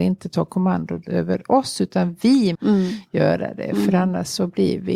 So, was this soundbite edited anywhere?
yes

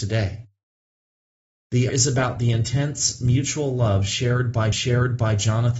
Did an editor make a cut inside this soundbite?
yes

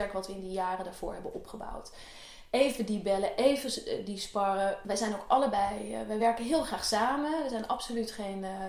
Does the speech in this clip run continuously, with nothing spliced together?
yes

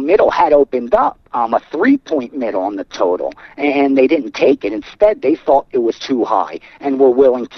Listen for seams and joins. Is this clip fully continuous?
no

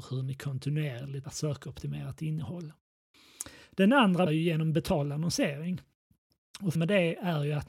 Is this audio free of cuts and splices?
no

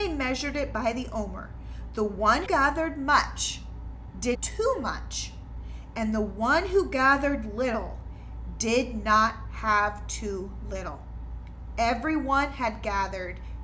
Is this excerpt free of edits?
no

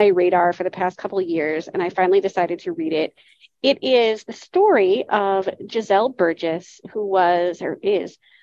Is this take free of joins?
yes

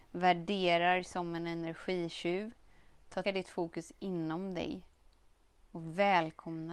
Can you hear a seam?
yes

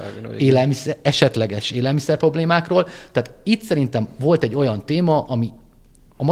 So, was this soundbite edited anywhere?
no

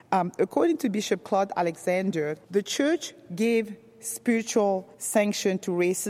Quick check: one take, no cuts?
no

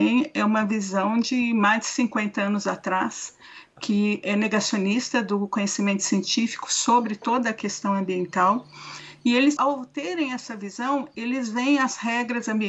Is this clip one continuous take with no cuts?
no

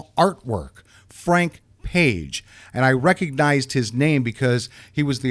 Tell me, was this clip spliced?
no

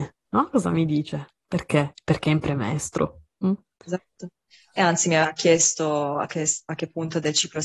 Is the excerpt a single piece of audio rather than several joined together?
yes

